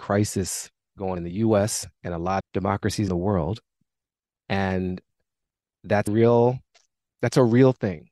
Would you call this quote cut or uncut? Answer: cut